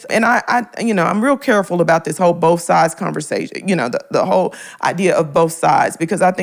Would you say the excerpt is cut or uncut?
uncut